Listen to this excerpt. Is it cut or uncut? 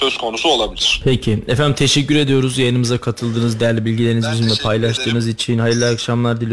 uncut